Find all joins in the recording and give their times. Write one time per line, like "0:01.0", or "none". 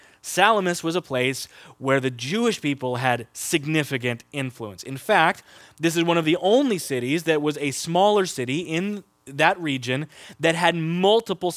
none